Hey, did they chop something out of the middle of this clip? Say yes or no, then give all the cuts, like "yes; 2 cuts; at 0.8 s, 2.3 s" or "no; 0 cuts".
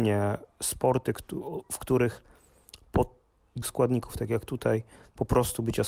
yes; 1 cut; at 3.6 s